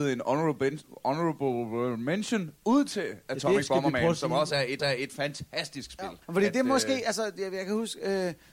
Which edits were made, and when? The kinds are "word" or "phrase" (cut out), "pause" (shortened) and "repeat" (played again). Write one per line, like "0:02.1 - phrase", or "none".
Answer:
0:04.8 - repeat
0:06.2 - pause